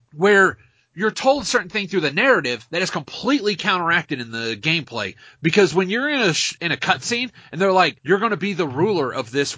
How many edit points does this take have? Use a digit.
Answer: 1